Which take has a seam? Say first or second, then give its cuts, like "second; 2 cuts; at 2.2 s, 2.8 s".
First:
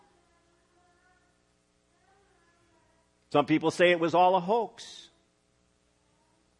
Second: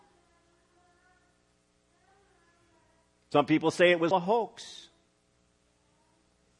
second; 1 cut; at 4.1 s